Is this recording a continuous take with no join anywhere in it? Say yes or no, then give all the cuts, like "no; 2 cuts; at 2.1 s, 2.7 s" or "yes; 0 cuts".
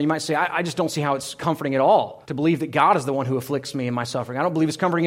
no; 1 cut; at 2.2 s